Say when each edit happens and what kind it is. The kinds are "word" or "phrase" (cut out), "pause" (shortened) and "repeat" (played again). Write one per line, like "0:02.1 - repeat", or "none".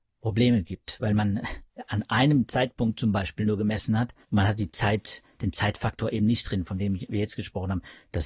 0:04.2 - pause